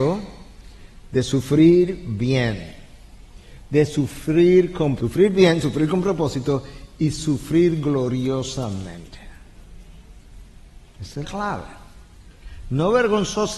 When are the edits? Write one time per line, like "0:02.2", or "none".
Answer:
0:05.0
0:11.2